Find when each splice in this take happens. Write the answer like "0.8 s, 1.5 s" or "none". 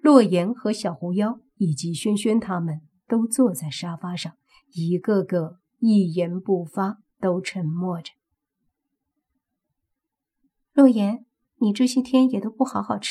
7.1 s